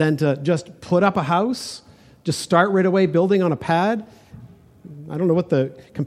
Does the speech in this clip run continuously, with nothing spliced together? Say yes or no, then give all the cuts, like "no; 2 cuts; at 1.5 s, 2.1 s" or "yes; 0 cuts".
yes; 0 cuts